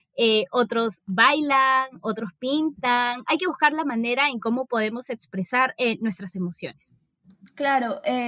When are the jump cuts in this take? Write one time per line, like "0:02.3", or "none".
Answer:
none